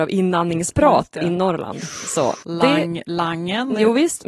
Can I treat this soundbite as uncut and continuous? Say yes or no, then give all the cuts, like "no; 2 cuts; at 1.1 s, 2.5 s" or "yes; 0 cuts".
no; 1 cut; at 2.4 s